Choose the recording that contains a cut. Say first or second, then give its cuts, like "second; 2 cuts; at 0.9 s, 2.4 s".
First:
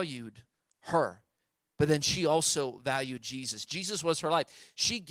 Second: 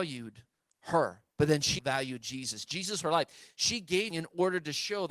second; 4 cuts; at 1.3 s, 1.8 s, 3.0 s, 4.1 s